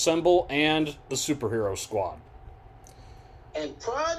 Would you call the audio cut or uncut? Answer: uncut